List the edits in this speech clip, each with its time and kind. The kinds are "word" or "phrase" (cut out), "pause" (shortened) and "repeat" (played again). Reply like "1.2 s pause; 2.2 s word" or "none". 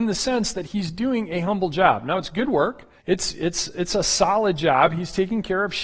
3.0 s pause